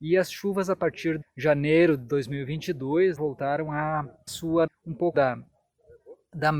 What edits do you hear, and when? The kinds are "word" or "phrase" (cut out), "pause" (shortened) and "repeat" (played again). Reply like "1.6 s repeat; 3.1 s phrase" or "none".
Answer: 1.2 s word; 3.2 s word; 4.3 s phrase; 4.7 s phrase; 5.1 s word